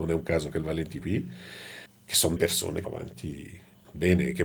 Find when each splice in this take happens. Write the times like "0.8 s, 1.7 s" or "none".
1.0 s, 2.4 s, 2.8 s